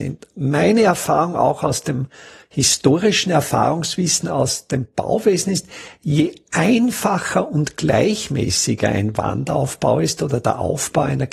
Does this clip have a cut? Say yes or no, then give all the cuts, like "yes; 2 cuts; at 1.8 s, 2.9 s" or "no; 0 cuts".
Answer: no; 0 cuts